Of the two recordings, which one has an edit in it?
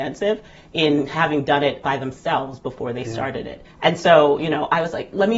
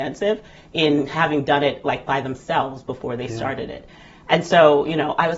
first; 2 cuts; at 1.8 s, 3.7 s

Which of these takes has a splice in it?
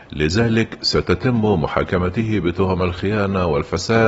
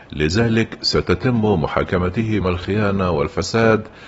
second; 1 cut; at 2.4 s

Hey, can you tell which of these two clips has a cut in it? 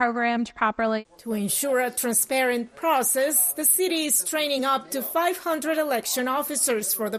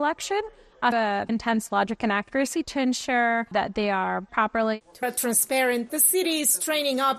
second; 7 cuts; at 0.9 s, 1.3 s, 2.6 s, 3.5 s, 4.3 s, 5.0 s, 5.9 s

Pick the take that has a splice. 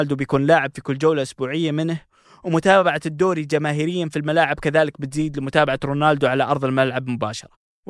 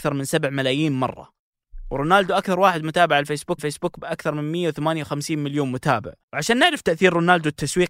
second; 2 cuts; at 3.6 s, 6.2 s

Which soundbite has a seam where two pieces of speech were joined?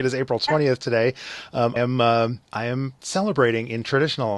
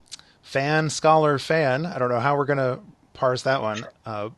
first; 3 cuts; at 1.8 s, 2.5 s, 3.0 s

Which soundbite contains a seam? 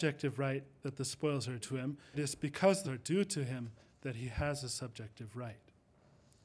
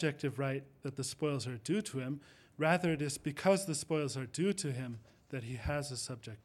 first; 3 cuts; at 1.6 s, 2.1 s, 2.8 s

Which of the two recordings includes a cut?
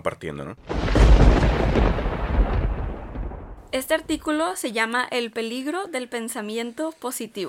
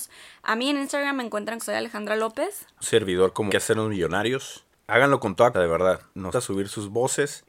second; 5 cuts; at 1.6 s, 2.8 s, 3.5 s, 5.5 s, 6.3 s

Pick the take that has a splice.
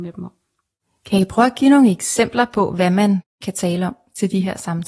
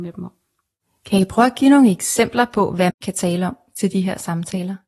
second; 1 cut; at 2.9 s

